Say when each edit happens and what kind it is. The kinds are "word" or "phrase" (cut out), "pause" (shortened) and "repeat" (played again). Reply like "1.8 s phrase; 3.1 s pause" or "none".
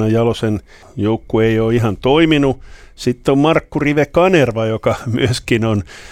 none